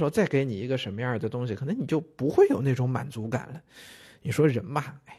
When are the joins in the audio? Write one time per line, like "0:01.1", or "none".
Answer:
none